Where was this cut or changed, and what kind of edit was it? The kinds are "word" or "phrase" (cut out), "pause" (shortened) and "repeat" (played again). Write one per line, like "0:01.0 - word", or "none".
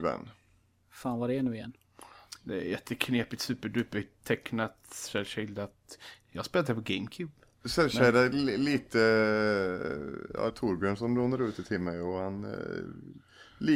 0:10.5 - phrase